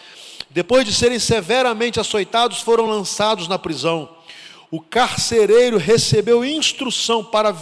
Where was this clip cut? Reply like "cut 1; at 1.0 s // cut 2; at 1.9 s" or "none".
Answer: none